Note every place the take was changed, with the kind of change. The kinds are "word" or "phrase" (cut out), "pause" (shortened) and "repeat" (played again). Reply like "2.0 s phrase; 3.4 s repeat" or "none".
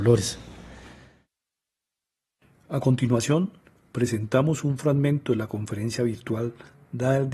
none